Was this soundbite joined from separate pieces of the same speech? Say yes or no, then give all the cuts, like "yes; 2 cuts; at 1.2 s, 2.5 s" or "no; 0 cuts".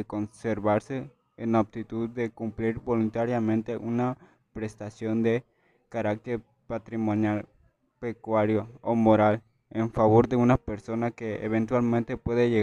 no; 0 cuts